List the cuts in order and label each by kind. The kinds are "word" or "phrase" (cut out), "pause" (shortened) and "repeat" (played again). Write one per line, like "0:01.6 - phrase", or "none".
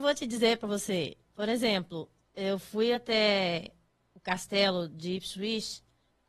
none